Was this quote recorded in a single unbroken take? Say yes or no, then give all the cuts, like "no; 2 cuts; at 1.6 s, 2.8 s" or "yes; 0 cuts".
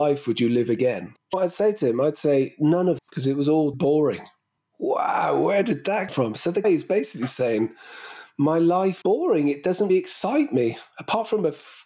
no; 7 cuts; at 1.3 s, 3.0 s, 3.7 s, 6.1 s, 6.6 s, 9.0 s, 9.9 s